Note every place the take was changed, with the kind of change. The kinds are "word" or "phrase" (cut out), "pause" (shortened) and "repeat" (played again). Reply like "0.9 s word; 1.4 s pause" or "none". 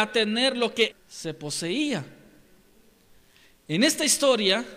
0.9 s word